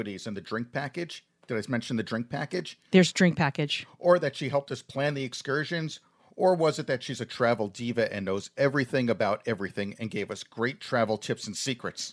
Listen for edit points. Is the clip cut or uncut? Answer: uncut